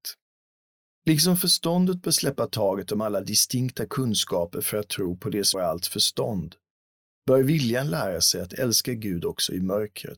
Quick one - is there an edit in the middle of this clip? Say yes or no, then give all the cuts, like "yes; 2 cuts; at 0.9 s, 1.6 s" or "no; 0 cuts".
yes; 1 cut; at 5.5 s